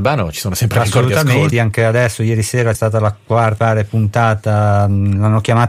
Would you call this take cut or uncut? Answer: cut